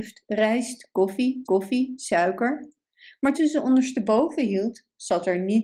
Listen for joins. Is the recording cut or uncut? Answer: cut